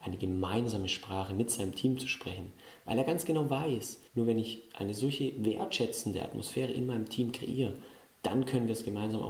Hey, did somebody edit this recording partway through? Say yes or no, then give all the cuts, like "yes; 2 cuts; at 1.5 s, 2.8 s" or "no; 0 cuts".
yes; 1 cut; at 4.1 s